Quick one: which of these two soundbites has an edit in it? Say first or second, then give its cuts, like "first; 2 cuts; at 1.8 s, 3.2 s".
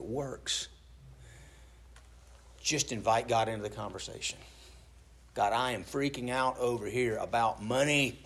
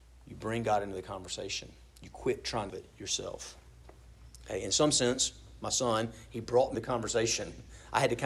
second; 2 cuts; at 2.7 s, 6.7 s